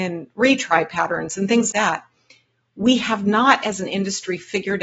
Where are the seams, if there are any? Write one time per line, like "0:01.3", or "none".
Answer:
0:01.7